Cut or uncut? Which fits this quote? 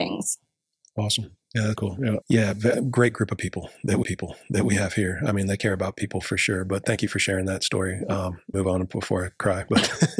cut